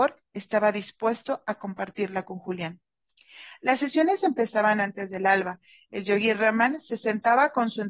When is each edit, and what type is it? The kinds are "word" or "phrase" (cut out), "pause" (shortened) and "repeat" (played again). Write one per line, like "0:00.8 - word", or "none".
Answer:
none